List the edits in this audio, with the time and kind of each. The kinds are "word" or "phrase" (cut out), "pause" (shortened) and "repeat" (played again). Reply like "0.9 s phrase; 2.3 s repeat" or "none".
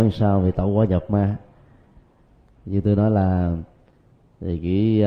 none